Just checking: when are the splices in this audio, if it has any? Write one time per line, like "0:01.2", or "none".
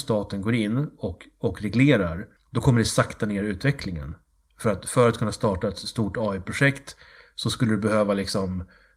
none